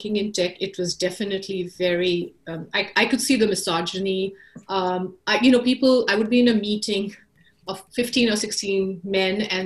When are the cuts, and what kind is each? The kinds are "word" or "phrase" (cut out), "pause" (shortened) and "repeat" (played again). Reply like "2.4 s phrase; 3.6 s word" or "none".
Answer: 7.9 s pause